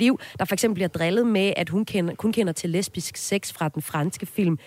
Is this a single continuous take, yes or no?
yes